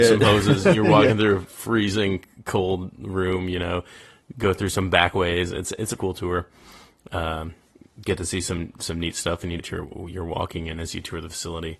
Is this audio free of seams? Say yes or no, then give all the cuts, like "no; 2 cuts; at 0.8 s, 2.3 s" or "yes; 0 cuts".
no; 2 cuts; at 6.0 s, 9.6 s